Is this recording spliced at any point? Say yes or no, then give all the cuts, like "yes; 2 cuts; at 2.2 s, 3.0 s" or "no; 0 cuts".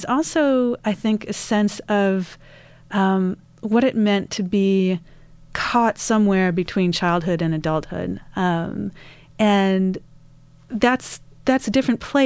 no; 0 cuts